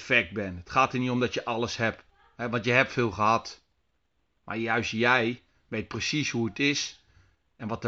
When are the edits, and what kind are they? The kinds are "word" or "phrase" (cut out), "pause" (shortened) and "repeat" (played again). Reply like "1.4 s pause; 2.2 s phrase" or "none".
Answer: none